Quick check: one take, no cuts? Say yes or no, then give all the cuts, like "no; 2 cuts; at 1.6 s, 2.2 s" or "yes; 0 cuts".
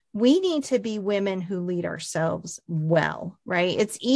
yes; 0 cuts